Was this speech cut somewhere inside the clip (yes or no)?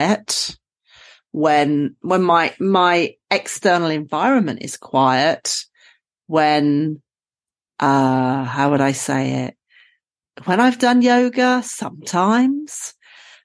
no